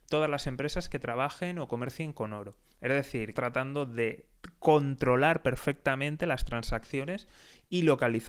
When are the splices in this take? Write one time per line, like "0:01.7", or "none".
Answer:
0:03.4
0:04.4